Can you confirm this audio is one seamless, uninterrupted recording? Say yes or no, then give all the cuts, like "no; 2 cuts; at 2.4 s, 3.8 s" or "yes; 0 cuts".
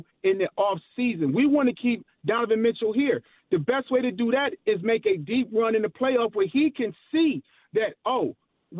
yes; 0 cuts